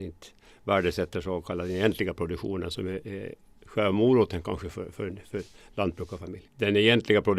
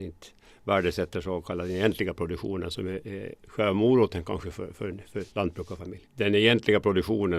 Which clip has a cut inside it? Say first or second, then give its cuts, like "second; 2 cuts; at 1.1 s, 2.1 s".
second; 2 cuts; at 3.4 s, 5.3 s